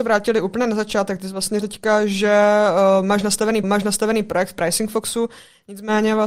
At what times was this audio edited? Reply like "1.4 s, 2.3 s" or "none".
1.6 s, 3.6 s